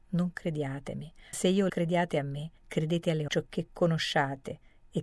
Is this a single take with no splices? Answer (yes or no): no